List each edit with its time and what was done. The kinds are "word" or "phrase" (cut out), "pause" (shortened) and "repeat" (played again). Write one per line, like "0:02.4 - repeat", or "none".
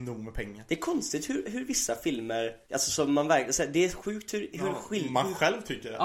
0:02.6 - pause